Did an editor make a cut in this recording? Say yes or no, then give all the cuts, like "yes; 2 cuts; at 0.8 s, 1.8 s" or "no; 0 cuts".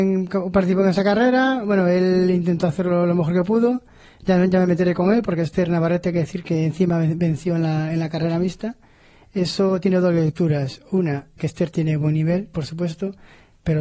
yes; 1 cut; at 11.4 s